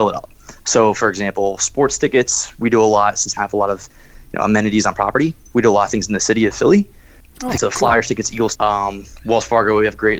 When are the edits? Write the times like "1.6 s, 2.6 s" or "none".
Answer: 3.4 s, 7.2 s, 7.6 s, 8.6 s